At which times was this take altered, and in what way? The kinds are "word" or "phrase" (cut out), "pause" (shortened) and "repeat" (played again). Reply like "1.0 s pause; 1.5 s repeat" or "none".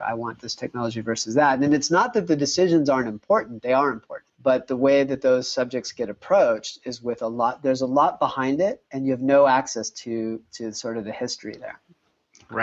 4.3 s pause; 8.8 s pause